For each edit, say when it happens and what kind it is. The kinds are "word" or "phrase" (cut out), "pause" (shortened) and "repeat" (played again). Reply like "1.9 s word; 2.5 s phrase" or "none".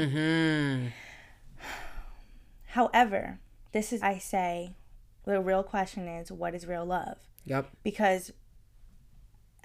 3.7 s pause; 4.0 s word